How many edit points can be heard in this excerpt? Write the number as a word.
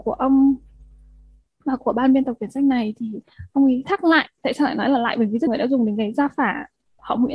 two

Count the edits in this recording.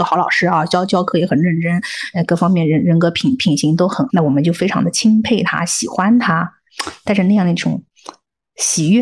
one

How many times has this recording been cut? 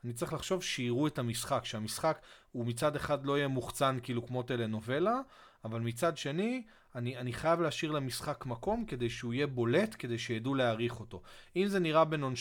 zero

